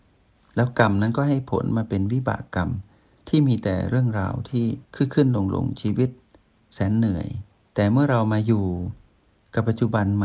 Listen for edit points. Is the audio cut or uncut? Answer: cut